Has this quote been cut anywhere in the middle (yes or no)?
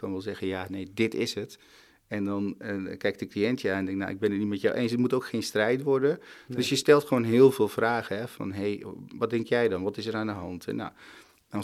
no